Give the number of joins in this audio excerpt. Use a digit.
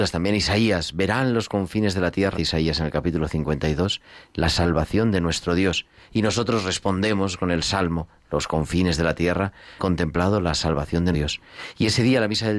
3